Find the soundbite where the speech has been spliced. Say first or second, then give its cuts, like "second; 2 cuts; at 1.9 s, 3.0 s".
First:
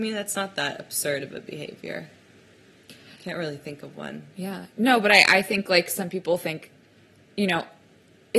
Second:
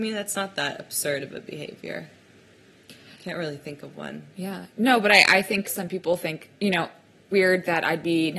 second; 3 cuts; at 5.6 s, 6.6 s, 7.3 s